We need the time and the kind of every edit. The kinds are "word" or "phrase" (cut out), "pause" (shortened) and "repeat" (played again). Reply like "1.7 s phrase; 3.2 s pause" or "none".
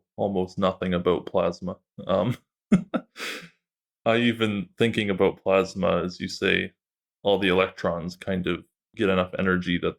none